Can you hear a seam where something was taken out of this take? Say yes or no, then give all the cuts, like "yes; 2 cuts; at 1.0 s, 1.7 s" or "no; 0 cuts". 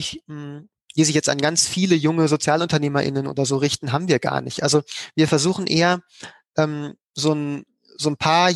yes; 1 cut; at 7.0 s